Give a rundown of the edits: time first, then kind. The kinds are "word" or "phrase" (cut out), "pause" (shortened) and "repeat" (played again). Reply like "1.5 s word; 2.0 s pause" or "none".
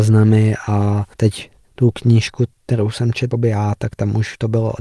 1.1 s pause; 3.3 s word